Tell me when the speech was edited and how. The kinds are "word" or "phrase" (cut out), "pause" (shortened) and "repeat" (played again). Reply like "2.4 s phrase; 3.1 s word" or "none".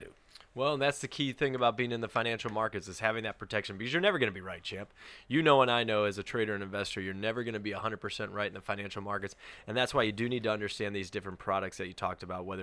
none